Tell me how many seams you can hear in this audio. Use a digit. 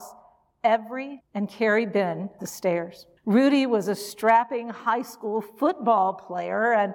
3